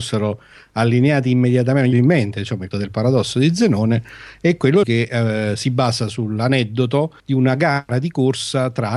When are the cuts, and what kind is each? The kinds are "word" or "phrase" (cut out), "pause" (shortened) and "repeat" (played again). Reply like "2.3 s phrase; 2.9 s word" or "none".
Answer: 1.9 s phrase; 2.7 s word; 4.8 s word; 7.2 s pause